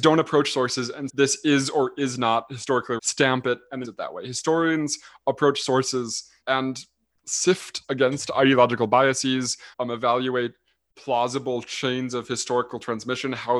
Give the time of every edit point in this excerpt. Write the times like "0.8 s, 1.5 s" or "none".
1.1 s, 3.0 s, 3.8 s, 6.4 s, 7.8 s, 9.7 s